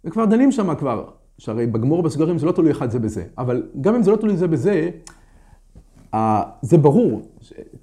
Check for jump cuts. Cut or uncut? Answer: uncut